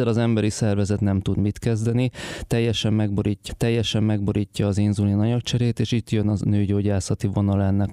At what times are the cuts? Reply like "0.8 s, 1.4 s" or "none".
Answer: 3.5 s